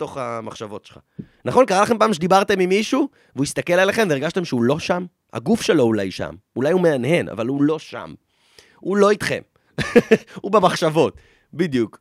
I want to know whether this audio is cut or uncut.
uncut